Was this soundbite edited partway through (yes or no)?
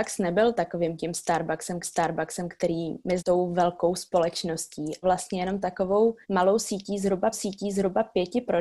yes